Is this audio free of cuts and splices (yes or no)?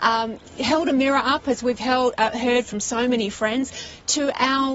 yes